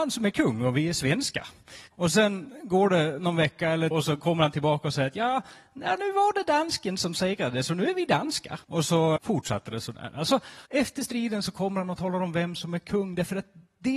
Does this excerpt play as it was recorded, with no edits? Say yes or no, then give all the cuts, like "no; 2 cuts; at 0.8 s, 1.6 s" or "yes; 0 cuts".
no; 5 cuts; at 1.9 s, 3.9 s, 8.6 s, 9.2 s, 10.7 s